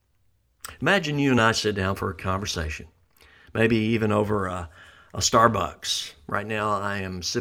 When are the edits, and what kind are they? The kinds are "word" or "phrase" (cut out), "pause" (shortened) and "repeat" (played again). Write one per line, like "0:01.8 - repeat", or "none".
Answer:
none